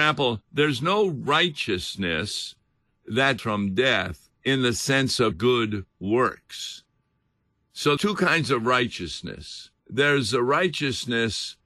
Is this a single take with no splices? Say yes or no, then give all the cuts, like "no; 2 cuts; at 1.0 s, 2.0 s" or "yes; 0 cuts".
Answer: no; 6 cuts; at 3.4 s, 4.3 s, 5.3 s, 5.9 s, 8.0 s, 9.8 s